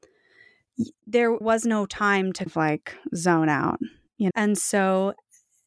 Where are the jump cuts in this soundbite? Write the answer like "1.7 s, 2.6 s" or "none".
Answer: 1.4 s, 2.5 s, 4.3 s